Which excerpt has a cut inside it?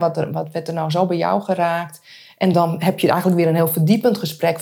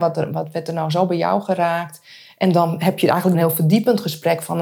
second; 1 cut; at 3.3 s

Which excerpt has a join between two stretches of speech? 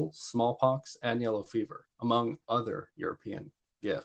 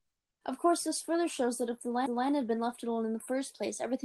second; 1 cut; at 2.1 s

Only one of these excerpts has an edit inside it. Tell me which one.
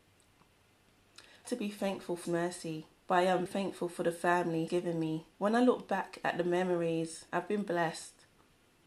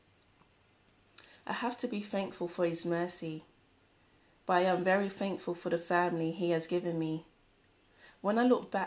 first; 7 cuts; at 1.4 s, 2.2 s, 3.0 s, 3.5 s, 4.7 s, 5.3 s, 7.3 s

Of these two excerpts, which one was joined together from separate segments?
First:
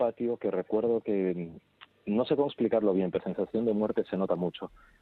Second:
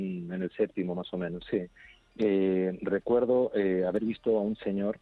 first; 1 cut; at 3.2 s

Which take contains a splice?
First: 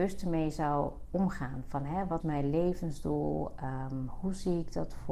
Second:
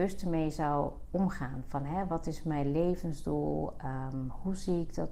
first; 1 cut; at 2.2 s

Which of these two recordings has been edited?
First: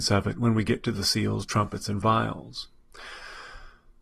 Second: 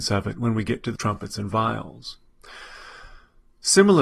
second; 1 cut; at 1.0 s

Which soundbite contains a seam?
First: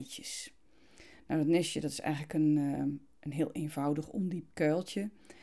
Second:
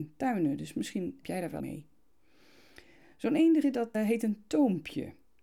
second; 4 cuts; at 1.2 s, 1.6 s, 3.6 s, 3.9 s

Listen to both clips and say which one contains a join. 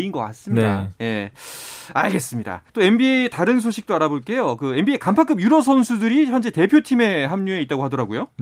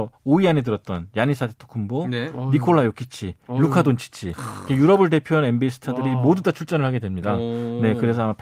first; 1 cut; at 2.7 s

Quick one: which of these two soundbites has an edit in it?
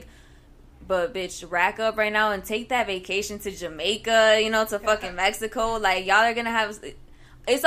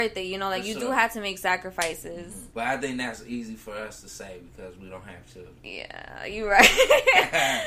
second; 2 cuts; at 2.5 s, 5.6 s

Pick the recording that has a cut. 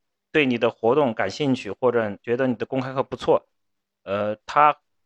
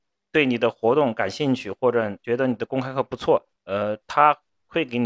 second; 1 cut; at 3.6 s

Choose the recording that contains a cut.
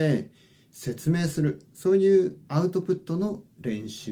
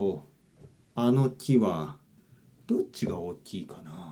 first; 2 cuts; at 1.7 s, 2.4 s

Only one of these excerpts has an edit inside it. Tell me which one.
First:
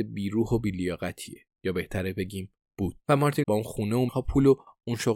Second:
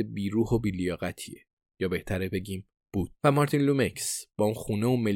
first; 3 cuts; at 1.5 s, 3.4 s, 4.1 s

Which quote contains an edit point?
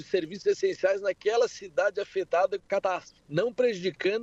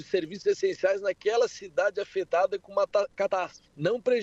first; 1 cut; at 2.6 s

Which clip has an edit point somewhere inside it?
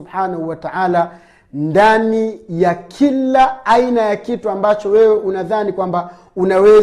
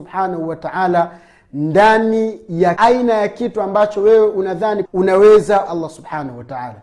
second; 3 cuts; at 2.8 s, 4.8 s, 5.7 s

